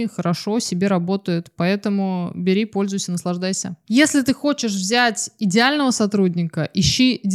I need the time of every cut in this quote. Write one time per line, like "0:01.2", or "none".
0:03.8